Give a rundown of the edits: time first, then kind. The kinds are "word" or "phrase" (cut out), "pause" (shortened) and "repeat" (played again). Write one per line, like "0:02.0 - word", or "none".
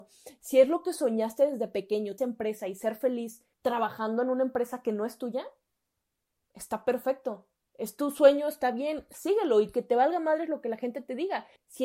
0:02.2 - phrase
0:03.5 - pause